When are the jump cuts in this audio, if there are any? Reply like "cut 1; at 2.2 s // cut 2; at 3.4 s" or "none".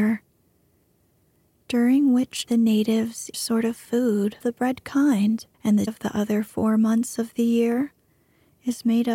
cut 1; at 2.5 s // cut 2; at 3.3 s // cut 3; at 4.4 s // cut 4; at 5.5 s // cut 5; at 5.9 s